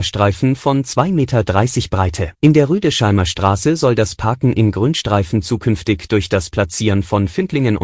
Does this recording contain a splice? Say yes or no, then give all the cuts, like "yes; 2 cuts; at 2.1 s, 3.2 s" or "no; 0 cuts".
yes; 1 cut; at 2.3 s